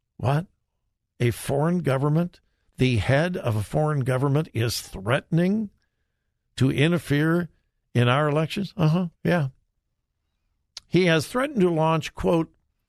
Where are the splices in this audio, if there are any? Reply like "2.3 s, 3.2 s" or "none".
9.1 s